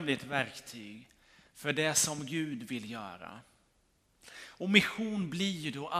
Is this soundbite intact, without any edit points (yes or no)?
yes